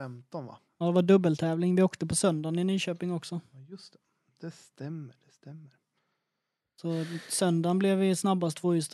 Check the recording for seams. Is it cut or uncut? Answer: uncut